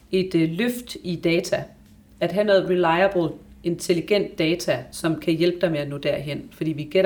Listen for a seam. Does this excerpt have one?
no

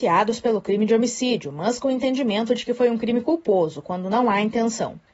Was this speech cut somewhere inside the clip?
no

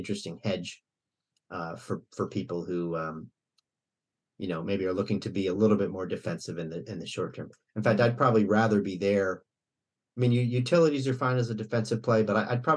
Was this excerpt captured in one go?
yes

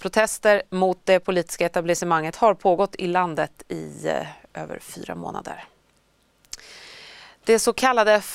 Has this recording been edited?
no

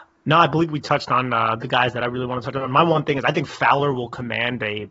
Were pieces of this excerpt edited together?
no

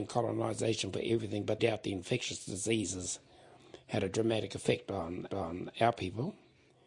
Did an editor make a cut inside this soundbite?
yes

